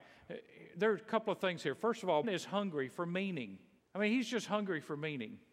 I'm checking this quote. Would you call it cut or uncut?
cut